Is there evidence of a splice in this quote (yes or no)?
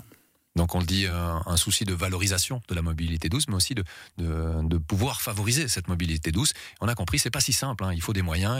no